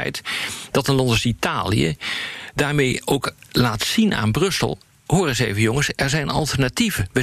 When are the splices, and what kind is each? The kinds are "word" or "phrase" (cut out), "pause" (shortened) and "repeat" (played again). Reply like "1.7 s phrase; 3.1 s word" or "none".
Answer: none